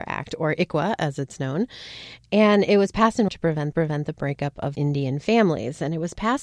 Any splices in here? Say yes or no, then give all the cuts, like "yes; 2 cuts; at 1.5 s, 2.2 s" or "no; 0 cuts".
yes; 2 cuts; at 3.3 s, 3.7 s